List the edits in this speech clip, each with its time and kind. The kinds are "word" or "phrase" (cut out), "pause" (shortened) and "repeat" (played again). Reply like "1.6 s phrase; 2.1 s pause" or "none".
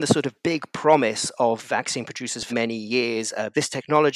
2.5 s word